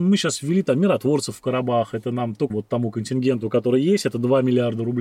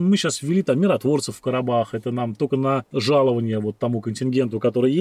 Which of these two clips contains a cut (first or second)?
first